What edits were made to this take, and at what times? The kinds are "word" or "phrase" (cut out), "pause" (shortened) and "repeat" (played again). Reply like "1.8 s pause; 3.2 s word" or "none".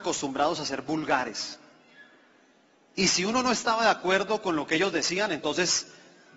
none